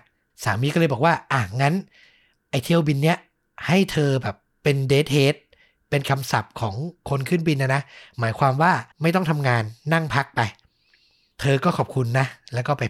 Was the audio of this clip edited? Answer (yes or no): yes